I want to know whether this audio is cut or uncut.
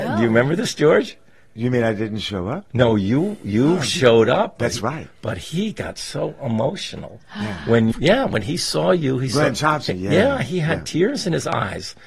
cut